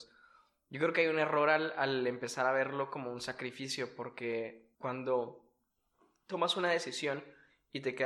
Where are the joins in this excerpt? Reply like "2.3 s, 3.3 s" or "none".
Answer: 4.7 s